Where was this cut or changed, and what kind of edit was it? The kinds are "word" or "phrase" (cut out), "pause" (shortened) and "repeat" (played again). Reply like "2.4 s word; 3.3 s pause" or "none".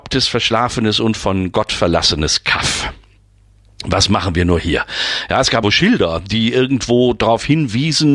5.6 s word

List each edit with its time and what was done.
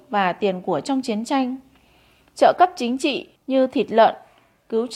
3.4 s pause

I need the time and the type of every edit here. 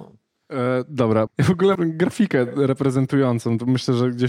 1.3 s word; 1.7 s word

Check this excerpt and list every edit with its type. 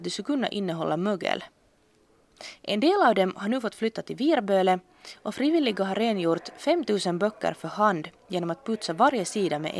none

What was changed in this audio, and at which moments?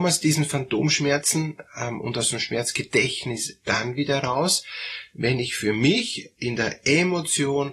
none

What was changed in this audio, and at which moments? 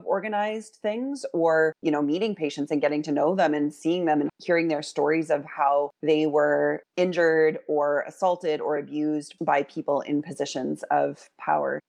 none

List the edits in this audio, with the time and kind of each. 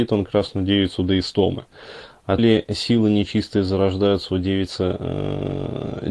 2.4 s word

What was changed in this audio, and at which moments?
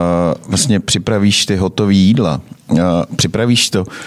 2.6 s pause

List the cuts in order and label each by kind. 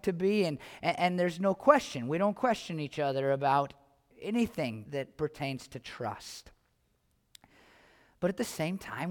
4.9 s word

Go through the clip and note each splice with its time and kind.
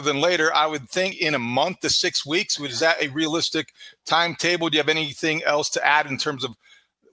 1.1 s word

